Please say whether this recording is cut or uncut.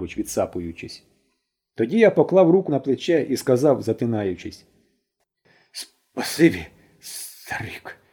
cut